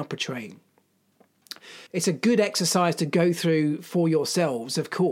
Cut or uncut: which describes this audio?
cut